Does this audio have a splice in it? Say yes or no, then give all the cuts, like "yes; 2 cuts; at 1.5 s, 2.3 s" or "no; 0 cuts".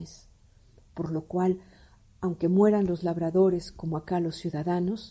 no; 0 cuts